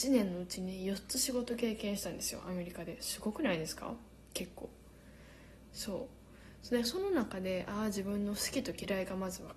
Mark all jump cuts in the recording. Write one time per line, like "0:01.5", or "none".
none